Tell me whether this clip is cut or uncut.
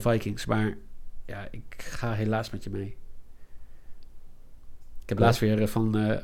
uncut